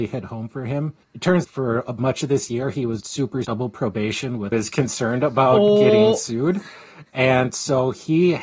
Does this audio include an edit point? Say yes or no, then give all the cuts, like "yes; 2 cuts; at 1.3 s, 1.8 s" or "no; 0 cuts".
yes; 5 cuts; at 1.0 s, 1.4 s, 3.0 s, 3.4 s, 4.5 s